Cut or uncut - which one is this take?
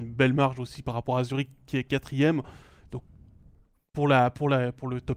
uncut